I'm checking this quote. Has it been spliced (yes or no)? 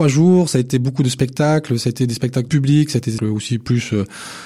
yes